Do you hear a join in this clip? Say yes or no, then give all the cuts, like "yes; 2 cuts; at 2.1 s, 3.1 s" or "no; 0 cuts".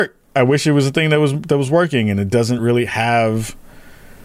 no; 0 cuts